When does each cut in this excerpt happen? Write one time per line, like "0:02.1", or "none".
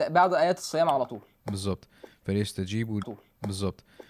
0:03.0